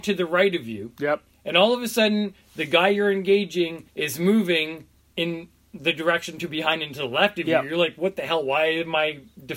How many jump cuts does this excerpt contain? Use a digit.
3